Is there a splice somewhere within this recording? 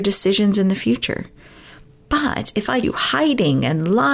yes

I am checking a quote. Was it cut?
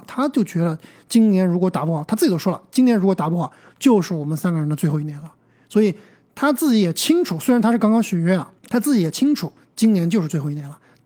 yes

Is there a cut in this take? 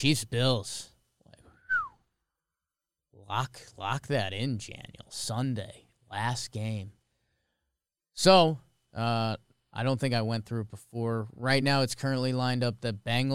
no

